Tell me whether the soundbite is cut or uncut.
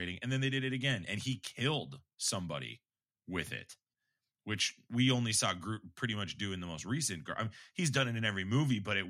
uncut